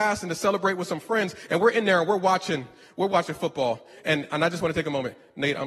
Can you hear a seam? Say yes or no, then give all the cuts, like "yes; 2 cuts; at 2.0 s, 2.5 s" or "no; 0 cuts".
no; 0 cuts